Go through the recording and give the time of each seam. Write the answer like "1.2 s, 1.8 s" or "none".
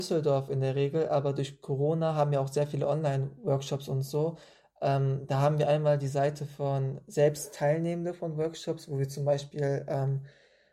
none